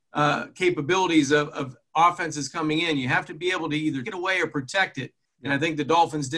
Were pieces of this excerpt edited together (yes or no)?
yes